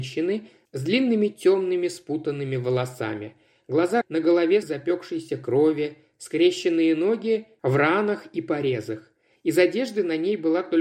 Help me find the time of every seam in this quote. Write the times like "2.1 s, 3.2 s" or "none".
4.0 s, 4.6 s